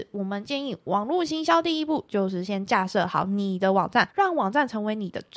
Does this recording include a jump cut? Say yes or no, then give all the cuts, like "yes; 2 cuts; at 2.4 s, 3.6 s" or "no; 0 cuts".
yes; 1 cut; at 4.1 s